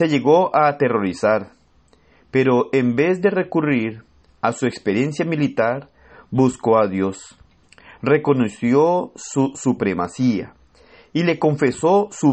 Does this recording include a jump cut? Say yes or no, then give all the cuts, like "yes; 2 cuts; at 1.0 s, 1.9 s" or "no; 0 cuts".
no; 0 cuts